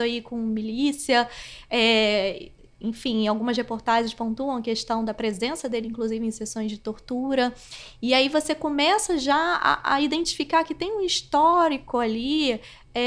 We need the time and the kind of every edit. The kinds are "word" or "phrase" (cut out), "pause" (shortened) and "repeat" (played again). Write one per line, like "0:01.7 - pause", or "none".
none